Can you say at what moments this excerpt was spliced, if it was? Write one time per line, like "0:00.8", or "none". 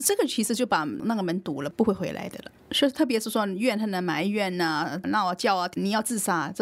0:05.0